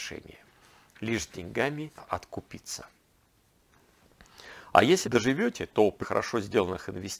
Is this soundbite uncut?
no; 3 cuts; at 2.0 s, 5.0 s, 6.0 s

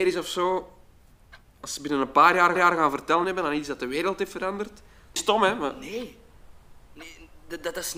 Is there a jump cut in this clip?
yes; 3 cuts; at 2.6 s, 3.2 s, 5.2 s

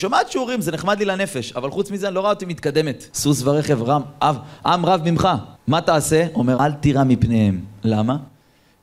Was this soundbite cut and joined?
yes; 3 cuts; at 3.1 s, 5.6 s, 6.6 s

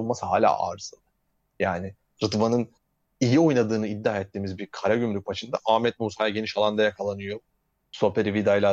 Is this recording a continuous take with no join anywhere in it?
yes; 0 cuts

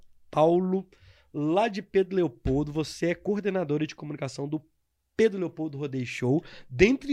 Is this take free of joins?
yes; 0 cuts

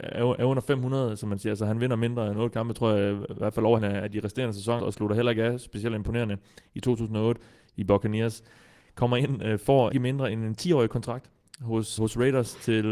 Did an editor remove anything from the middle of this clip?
yes; 4 cuts; at 3.8 s, 4.8 s, 9.9 s, 12.0 s

